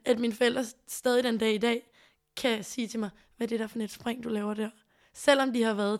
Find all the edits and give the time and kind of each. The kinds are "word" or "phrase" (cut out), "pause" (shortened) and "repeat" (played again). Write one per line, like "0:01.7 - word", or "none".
none